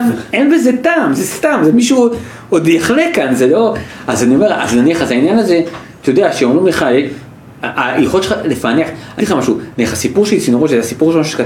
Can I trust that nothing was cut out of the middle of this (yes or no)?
no